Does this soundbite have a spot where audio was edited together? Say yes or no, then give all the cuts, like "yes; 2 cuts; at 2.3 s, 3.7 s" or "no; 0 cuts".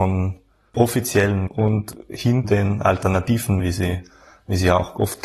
yes; 3 cuts; at 1.5 s, 2.4 s, 3.6 s